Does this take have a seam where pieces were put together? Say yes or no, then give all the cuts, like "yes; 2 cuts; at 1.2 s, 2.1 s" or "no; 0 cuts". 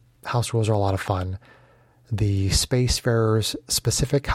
no; 0 cuts